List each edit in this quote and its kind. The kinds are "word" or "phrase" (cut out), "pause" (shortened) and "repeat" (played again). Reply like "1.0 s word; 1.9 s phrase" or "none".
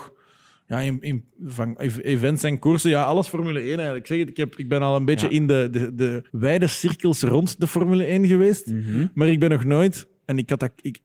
6.3 s pause